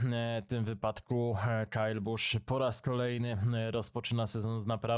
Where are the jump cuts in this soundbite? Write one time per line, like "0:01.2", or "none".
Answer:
none